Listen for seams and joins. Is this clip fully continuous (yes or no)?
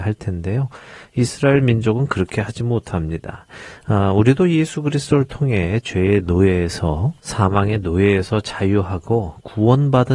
yes